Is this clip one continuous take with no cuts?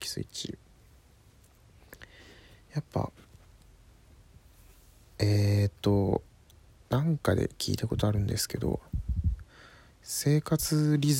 yes; 0 cuts

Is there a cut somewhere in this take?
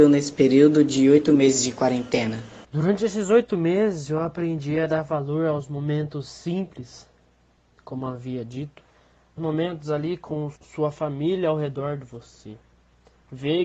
yes; 3 cuts; at 2.6 s, 9.4 s, 10.6 s

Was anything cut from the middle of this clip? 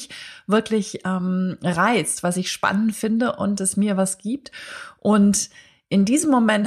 no; 0 cuts

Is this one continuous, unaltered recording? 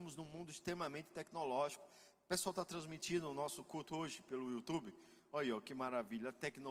yes; 0 cuts

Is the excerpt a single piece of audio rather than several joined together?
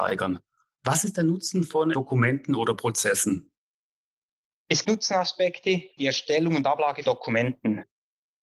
no; 4 cuts; at 1.9 s, 4.8 s, 6.0 s, 7.1 s

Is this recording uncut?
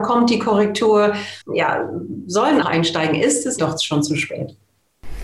no; 3 cuts; at 1.4 s, 2.6 s, 3.6 s

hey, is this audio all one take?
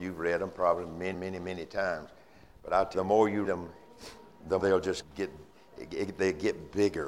no; 5 cuts; at 1.1 s, 2.9 s, 3.4 s, 4.6 s, 5.0 s

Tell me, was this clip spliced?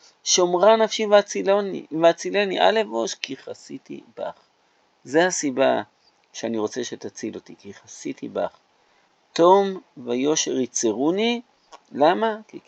no; 0 cuts

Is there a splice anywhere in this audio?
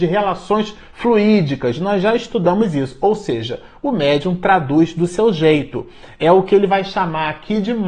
no; 0 cuts

